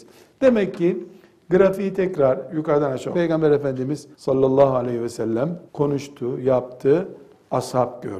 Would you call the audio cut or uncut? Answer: cut